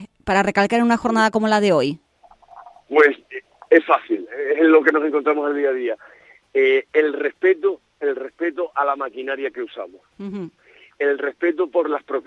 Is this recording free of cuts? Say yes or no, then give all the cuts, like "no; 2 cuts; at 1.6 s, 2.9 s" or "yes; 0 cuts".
yes; 0 cuts